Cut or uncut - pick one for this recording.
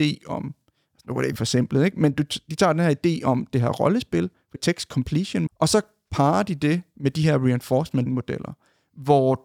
cut